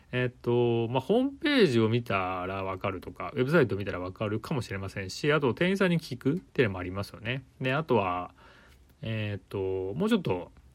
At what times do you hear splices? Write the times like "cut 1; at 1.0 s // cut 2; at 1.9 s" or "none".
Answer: cut 1; at 6.5 s